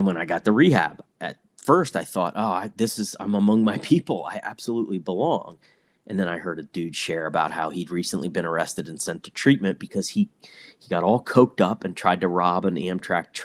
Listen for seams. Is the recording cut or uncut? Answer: cut